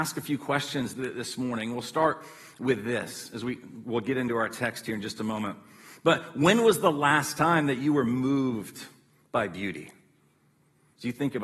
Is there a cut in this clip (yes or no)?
no